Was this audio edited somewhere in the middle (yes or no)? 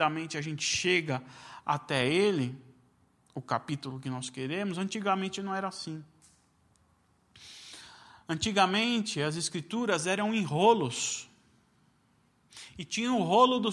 no